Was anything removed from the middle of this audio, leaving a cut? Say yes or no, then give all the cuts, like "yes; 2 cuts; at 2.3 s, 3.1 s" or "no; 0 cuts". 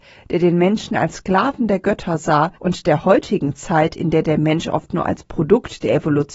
yes; 1 cut; at 2.6 s